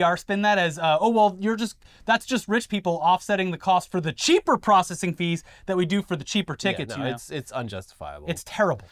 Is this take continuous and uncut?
yes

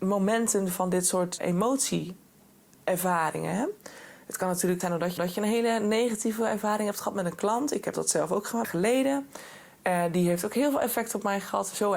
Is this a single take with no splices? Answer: no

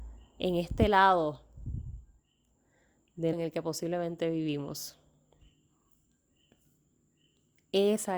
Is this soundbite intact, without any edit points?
no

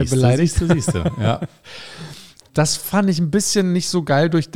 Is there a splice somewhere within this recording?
no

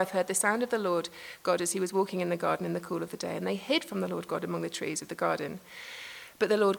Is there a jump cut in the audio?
no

